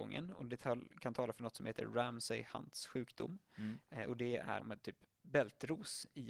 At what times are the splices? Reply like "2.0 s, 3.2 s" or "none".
4.6 s